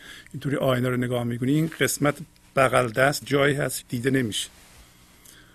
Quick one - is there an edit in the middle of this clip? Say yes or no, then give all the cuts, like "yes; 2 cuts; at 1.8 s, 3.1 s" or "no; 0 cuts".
yes; 2 cuts; at 3.2 s, 3.8 s